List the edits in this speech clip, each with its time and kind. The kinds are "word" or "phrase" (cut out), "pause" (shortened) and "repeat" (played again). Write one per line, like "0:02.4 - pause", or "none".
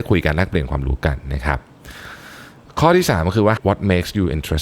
0:03.6 - word